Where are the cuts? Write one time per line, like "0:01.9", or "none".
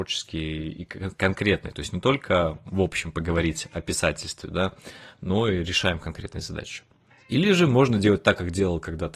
0:07.1